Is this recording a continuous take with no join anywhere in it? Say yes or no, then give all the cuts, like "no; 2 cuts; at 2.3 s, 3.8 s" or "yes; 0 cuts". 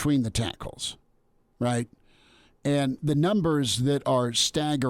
yes; 0 cuts